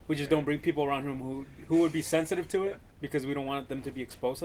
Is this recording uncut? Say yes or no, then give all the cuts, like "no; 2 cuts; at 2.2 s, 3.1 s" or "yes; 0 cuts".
no; 1 cut; at 2.9 s